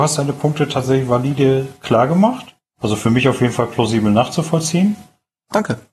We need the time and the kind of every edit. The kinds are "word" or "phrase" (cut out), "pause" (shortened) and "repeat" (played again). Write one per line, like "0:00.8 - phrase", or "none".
none